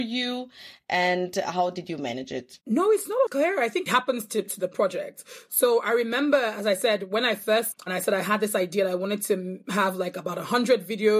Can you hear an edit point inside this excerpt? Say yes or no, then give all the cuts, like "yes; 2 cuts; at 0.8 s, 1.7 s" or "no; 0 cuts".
yes; 4 cuts; at 2.6 s, 3.3 s, 3.9 s, 7.7 s